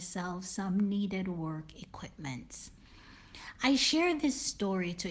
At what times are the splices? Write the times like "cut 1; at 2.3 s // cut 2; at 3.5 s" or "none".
none